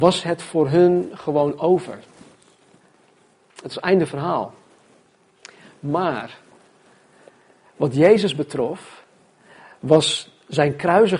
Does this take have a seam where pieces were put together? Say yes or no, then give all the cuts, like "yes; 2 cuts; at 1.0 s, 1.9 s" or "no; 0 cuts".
no; 0 cuts